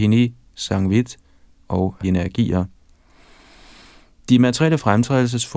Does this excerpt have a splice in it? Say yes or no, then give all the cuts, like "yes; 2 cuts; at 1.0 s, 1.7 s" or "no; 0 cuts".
yes; 1 cut; at 2.0 s